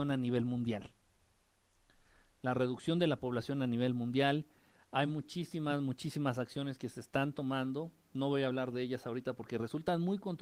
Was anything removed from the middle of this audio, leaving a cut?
no; 0 cuts

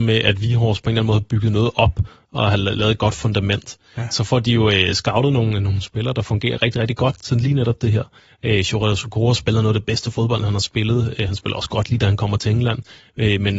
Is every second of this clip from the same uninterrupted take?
yes; 0 cuts

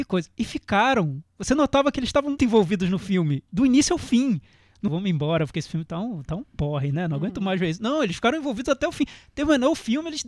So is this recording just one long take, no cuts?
no; 2 cuts; at 2.4 s, 4.9 s

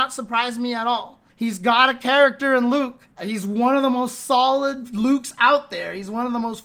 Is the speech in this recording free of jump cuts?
no; 2 cuts; at 1.3 s, 3.1 s

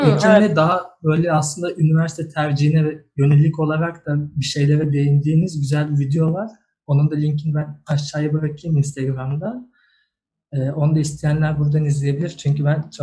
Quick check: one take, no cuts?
yes; 0 cuts

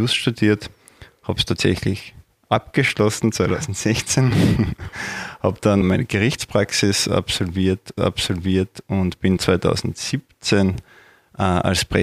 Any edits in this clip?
yes; 3 cuts; at 5.8 s, 8.0 s, 9.4 s

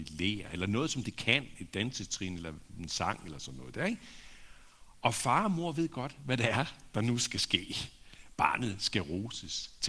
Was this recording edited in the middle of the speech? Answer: no; 0 cuts

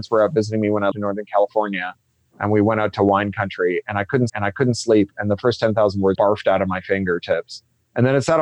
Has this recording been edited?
yes; 3 cuts; at 0.9 s, 4.3 s, 6.1 s

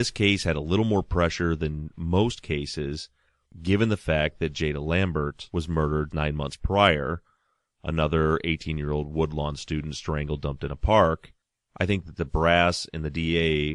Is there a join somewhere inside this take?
yes; 1 cut; at 6.1 s

